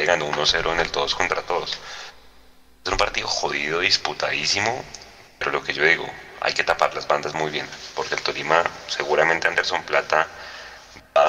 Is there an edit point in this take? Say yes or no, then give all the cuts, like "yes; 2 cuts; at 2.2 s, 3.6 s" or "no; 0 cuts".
no; 0 cuts